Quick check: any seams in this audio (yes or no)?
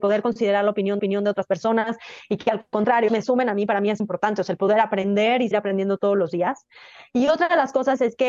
yes